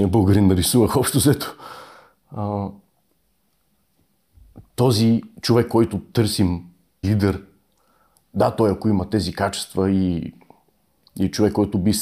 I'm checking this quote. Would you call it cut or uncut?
cut